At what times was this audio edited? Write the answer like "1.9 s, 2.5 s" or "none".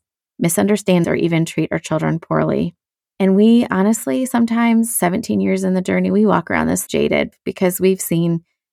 1.0 s, 2.9 s, 6.9 s